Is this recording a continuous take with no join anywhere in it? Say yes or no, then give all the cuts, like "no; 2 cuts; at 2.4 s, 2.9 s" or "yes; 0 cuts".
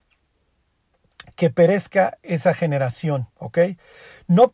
no; 1 cut; at 3.3 s